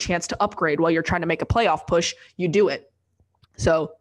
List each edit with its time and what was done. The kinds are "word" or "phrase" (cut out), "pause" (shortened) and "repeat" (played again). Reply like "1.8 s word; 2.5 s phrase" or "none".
none